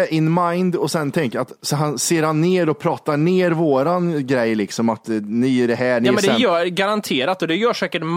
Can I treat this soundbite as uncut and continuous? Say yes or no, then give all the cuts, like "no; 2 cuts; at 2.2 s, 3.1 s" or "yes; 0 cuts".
yes; 0 cuts